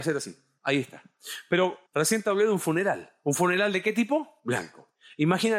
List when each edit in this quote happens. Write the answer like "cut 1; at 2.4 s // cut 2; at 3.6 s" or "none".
cut 1; at 1.9 s